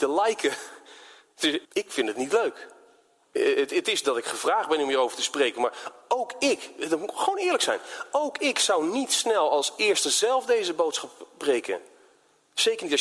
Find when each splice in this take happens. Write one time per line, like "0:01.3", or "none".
0:01.6